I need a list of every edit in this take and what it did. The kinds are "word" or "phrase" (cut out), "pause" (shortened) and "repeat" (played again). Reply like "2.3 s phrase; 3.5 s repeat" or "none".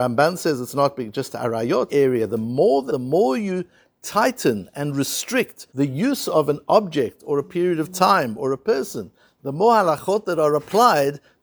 1.9 s phrase; 2.9 s word; 5.7 s pause

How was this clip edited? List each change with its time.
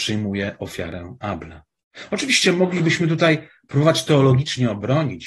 none

